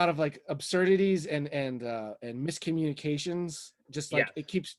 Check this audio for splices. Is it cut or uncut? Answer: uncut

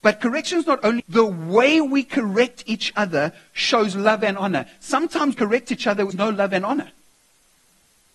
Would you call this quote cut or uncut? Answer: cut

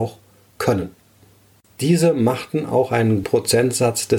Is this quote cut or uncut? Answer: cut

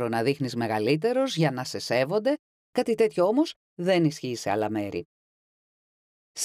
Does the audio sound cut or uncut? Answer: uncut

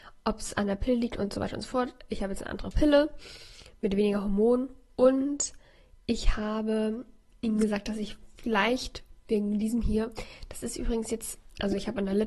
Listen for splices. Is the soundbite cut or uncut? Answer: uncut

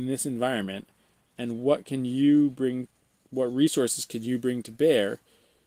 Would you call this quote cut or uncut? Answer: uncut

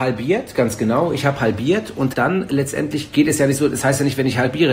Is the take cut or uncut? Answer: cut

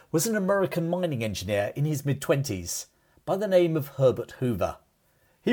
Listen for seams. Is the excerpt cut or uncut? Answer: uncut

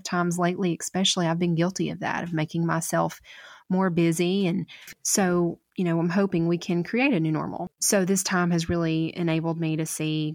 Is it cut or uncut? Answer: uncut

